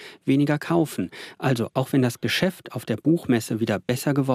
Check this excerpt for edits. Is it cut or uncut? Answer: uncut